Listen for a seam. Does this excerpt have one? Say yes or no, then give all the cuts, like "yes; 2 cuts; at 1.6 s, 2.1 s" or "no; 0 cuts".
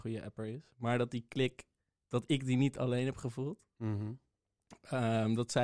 no; 0 cuts